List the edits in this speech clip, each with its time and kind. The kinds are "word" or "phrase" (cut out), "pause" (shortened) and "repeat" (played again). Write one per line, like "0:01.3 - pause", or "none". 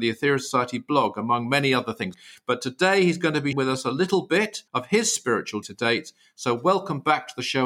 0:03.5 - word
0:04.7 - pause
0:05.6 - word